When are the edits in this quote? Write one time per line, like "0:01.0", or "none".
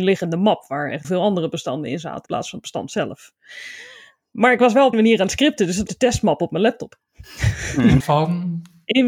0:01.0
0:02.3
0:04.9
0:05.9
0:08.0